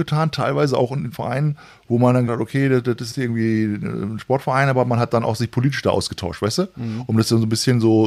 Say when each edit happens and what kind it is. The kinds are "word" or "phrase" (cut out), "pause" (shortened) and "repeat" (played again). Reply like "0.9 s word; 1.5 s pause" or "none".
2.3 s word; 3.1 s word